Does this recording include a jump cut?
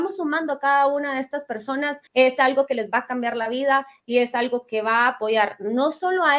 yes; 1 cut; at 2.1 s

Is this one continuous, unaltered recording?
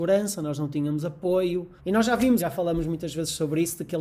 no; 2 cuts; at 1.8 s, 2.4 s

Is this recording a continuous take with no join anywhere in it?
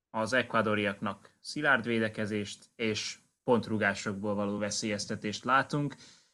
yes; 0 cuts

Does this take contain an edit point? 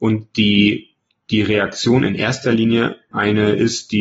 yes; 1 cut; at 3.1 s

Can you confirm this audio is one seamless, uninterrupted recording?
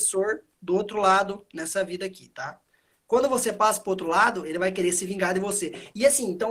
yes; 0 cuts

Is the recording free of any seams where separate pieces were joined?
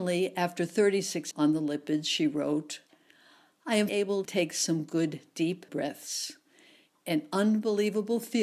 no; 4 cuts; at 1.3 s, 3.9 s, 4.2 s, 5.7 s

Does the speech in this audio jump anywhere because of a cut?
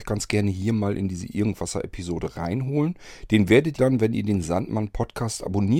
yes; 1 cut; at 3.8 s

